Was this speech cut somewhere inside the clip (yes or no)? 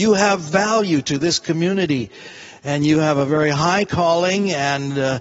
no